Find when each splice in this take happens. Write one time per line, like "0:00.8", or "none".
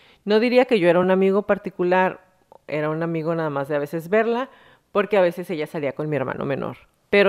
none